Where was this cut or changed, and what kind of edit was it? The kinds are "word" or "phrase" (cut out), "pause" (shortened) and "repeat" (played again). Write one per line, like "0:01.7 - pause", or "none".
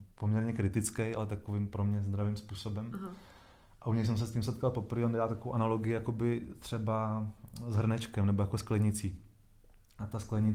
none